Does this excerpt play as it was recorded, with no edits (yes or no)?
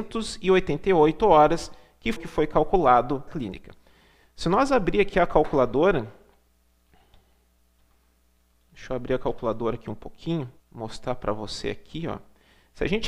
no